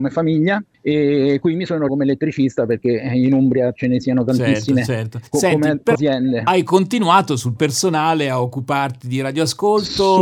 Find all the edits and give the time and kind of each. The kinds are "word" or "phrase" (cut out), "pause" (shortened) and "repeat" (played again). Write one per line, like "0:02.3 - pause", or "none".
0:01.9 - word
0:03.8 - phrase
0:05.3 - pause
0:05.9 - word
0:07.6 - word